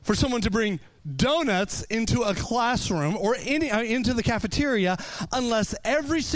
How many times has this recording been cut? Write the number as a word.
zero